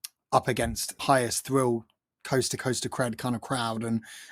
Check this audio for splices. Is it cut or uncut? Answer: cut